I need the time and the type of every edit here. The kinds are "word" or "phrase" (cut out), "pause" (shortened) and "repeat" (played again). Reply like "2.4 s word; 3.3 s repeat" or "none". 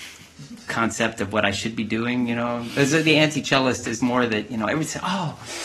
4.0 s word